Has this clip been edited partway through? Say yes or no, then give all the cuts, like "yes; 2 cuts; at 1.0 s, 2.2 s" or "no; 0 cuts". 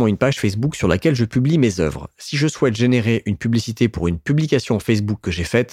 no; 0 cuts